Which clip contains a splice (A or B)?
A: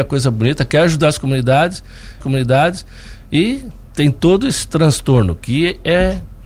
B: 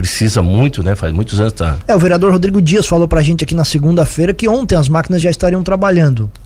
A